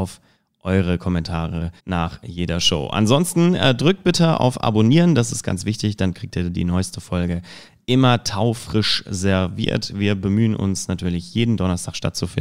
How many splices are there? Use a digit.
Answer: 1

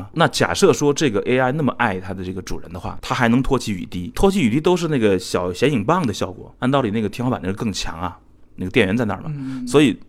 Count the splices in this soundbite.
1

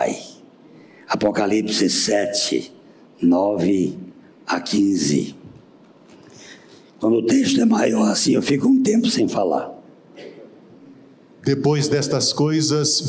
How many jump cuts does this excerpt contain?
0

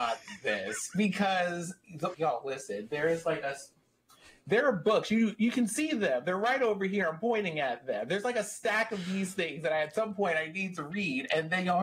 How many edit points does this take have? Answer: 1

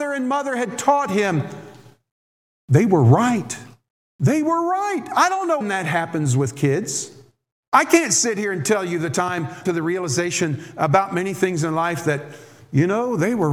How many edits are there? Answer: 4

